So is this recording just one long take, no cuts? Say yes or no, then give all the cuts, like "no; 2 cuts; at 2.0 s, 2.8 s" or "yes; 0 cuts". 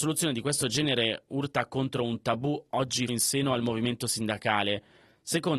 no; 1 cut; at 3.1 s